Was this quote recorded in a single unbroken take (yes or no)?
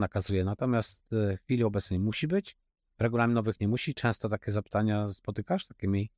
yes